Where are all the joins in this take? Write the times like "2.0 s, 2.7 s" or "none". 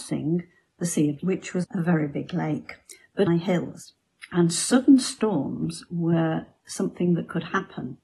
1.2 s, 1.6 s, 3.3 s